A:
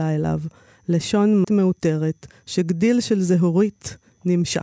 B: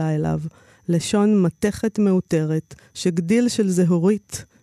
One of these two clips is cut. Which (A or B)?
A